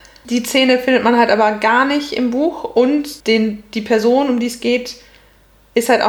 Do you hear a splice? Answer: yes; 1 cut; at 3.2 s

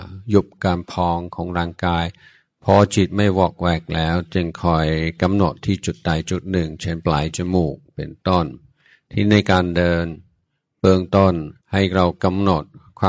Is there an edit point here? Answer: yes; 1 cut; at 11.6 s

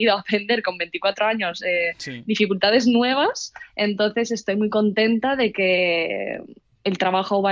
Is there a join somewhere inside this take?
no; 0 cuts

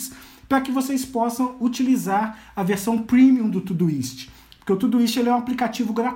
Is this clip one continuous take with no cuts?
yes; 0 cuts

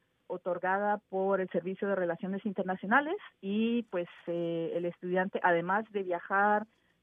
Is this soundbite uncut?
yes; 0 cuts

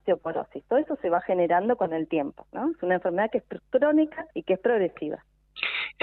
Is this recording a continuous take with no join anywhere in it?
no; 1 cut; at 4.3 s

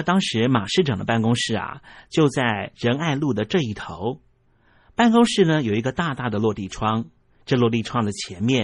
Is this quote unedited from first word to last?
yes; 0 cuts

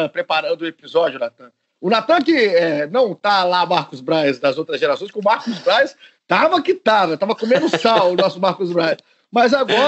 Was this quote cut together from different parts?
no; 0 cuts

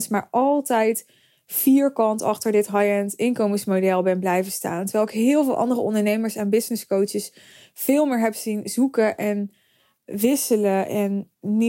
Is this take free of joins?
yes; 0 cuts

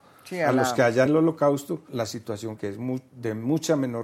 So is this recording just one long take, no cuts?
no; 3 cuts; at 1.1 s, 1.9 s, 2.6 s

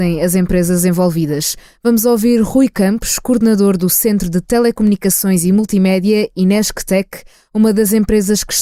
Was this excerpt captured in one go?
yes; 0 cuts

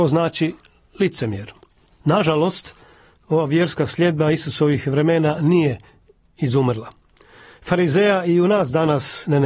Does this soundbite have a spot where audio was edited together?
no; 0 cuts

